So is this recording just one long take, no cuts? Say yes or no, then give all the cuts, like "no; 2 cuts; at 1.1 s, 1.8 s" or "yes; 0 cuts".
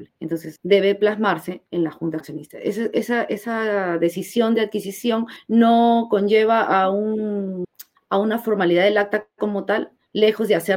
no; 1 cut; at 2.2 s